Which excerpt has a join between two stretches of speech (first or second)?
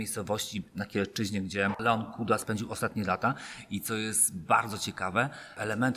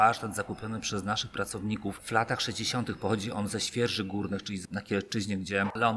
second